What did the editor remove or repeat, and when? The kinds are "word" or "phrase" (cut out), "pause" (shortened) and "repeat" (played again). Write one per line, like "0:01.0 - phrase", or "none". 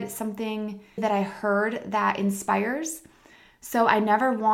0:01.0 - word